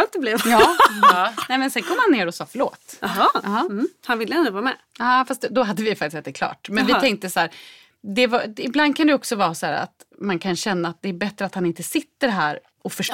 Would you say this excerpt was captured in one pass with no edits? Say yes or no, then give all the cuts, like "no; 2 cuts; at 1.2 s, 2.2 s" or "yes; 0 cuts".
no; 1 cut; at 4.9 s